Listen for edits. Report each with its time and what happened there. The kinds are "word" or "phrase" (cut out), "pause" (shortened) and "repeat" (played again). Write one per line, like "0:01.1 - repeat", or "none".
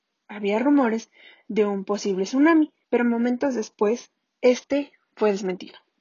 0:02.8 - pause